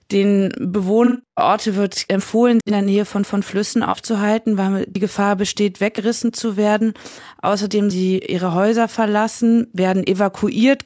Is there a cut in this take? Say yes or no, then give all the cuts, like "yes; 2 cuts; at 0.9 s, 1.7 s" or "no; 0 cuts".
yes; 3 cuts; at 2.6 s, 3.2 s, 7.9 s